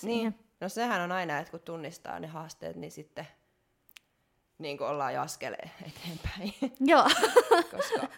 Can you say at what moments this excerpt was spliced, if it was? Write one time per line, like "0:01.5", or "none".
none